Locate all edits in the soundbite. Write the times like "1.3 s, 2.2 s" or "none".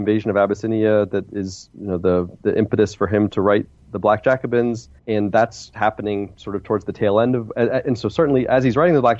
5.0 s